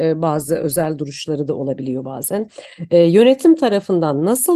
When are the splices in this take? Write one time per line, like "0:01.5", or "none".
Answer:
none

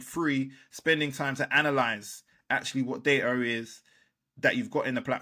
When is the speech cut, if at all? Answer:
none

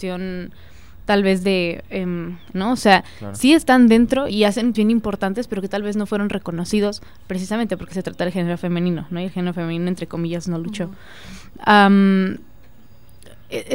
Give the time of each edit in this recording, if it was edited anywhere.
0:02.5
0:04.3
0:04.7

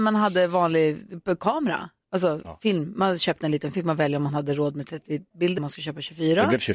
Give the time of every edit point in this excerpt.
0:03.7
0:05.6

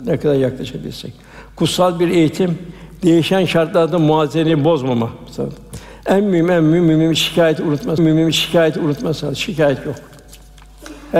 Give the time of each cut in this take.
0:08.0

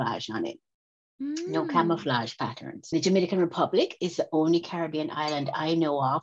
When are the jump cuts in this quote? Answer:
0:02.9

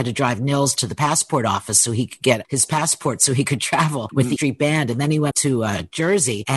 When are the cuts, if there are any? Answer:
0:04.4
0:05.3

